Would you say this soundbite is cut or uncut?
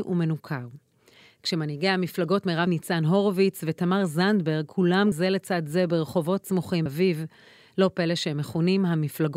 cut